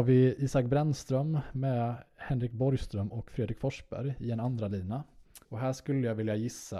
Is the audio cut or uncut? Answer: cut